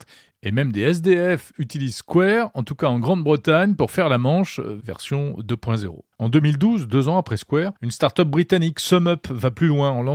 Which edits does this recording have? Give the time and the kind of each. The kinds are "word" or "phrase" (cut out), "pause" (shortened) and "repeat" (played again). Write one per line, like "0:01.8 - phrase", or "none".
0:06.1 - pause
0:07.8 - pause